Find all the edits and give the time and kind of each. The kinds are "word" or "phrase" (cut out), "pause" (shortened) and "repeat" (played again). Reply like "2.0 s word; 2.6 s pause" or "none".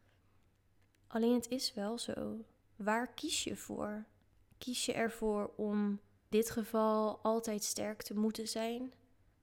2.6 s pause; 6.3 s word